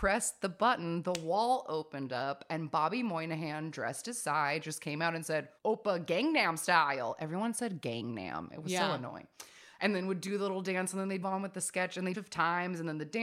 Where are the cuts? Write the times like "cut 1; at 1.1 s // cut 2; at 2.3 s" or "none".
cut 1; at 5.6 s // cut 2; at 11.2 s // cut 3; at 12.1 s